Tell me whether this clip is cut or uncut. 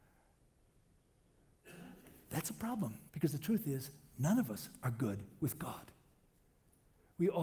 cut